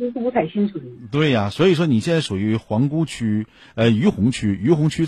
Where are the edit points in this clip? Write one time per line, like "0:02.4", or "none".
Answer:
none